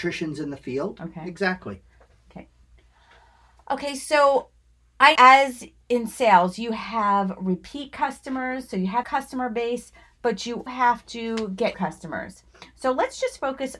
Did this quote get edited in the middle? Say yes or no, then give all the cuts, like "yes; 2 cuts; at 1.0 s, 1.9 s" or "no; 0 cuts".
yes; 4 cuts; at 5.2 s, 9.0 s, 10.7 s, 11.7 s